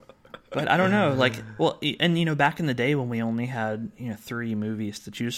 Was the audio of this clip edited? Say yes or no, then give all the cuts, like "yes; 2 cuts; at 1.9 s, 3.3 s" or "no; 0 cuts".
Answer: no; 0 cuts